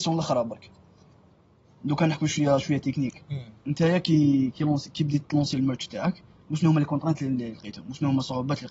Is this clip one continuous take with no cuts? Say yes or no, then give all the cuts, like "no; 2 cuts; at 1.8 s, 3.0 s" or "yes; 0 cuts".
yes; 0 cuts